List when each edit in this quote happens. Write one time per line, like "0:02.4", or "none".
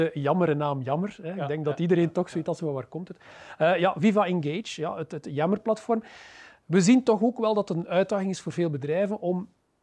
none